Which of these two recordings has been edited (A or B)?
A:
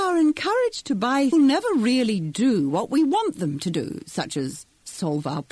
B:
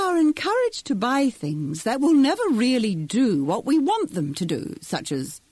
A